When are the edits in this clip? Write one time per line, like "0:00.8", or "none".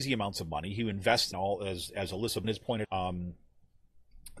0:01.3
0:02.4
0:02.8

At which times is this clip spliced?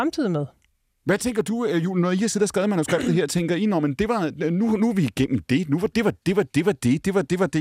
none

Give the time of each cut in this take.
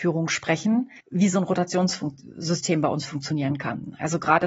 0:01.0

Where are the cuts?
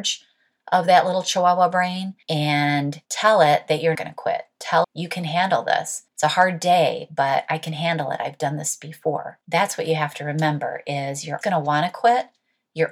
0:03.9
0:04.8
0:06.1
0:11.4

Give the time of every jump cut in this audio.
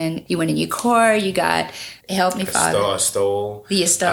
0:02.0

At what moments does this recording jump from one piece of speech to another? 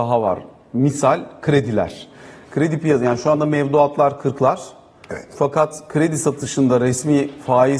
none

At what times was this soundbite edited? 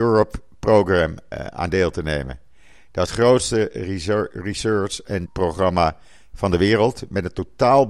0:01.3
0:03.1
0:05.3

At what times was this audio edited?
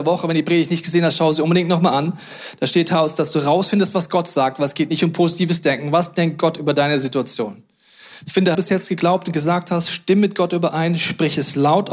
0:08.5

